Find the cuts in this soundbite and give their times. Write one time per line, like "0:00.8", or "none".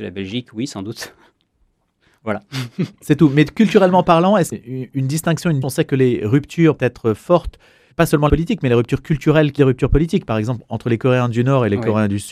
0:04.5
0:05.6
0:06.8
0:07.9
0:08.3
0:09.6